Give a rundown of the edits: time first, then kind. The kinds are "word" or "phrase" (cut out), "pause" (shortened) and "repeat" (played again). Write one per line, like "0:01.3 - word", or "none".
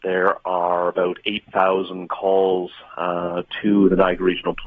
none